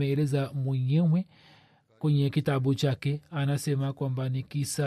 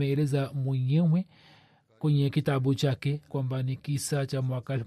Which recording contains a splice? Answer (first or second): second